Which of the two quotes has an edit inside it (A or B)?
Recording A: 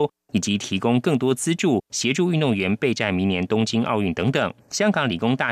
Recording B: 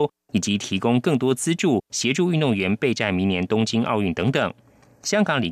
A